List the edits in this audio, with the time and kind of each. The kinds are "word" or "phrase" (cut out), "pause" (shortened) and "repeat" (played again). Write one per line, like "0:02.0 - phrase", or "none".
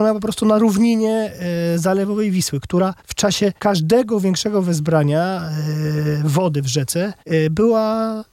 0:03.0 - pause
0:03.6 - pause
0:07.2 - pause